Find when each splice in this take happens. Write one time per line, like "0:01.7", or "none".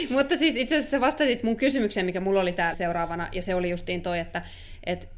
0:02.7